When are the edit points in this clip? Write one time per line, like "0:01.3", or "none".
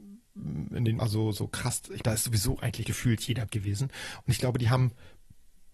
0:01.0
0:02.0
0:02.8
0:03.5